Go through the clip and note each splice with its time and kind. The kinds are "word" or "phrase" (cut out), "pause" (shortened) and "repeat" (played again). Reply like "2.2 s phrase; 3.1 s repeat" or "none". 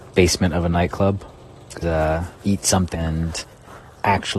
1.8 s word; 2.4 s pause; 2.9 s word